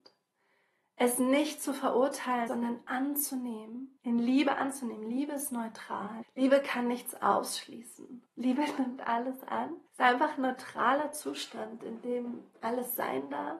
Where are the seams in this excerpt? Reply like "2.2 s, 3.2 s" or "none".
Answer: 2.5 s, 4.0 s, 6.2 s, 8.3 s, 9.9 s